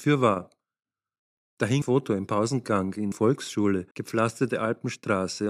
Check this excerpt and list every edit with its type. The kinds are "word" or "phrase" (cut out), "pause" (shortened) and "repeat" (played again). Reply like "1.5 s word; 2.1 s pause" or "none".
1.8 s word; 3.1 s word; 3.9 s pause